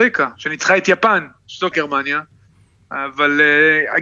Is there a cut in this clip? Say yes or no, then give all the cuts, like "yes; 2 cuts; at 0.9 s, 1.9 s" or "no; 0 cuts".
yes; 1 cut; at 1.7 s